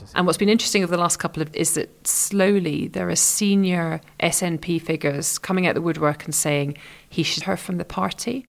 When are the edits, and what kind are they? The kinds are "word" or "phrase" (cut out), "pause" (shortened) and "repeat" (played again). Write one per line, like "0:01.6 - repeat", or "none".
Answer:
0:01.5 - word
0:04.1 - pause
0:07.4 - word